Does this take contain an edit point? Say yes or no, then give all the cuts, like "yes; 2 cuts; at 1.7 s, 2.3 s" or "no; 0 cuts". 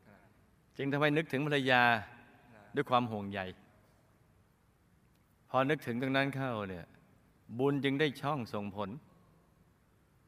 no; 0 cuts